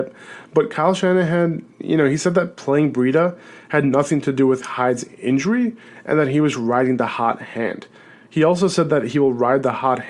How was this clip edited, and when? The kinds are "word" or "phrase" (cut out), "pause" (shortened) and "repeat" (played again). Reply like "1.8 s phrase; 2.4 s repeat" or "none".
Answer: none

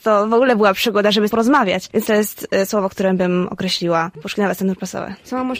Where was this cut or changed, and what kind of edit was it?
1.3 s phrase; 2.1 s phrase

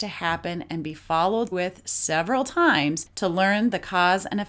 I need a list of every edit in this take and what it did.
1.5 s word

